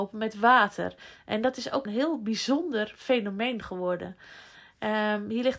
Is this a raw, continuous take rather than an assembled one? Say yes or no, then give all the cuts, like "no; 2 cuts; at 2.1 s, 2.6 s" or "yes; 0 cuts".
no; 1 cut; at 1.9 s